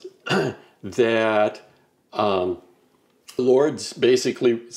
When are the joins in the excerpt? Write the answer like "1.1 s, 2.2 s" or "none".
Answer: 3.4 s